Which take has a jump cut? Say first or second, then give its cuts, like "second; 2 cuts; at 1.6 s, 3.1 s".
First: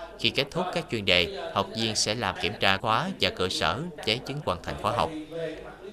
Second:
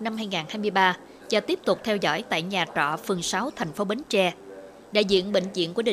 first; 4 cuts; at 2.4 s, 2.8 s, 4.0 s, 4.4 s